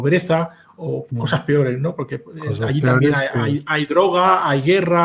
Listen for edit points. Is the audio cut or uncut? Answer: uncut